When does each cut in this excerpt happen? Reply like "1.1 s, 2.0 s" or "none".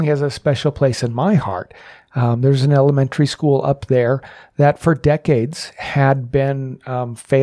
none